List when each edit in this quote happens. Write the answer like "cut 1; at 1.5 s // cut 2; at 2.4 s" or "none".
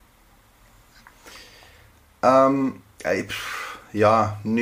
none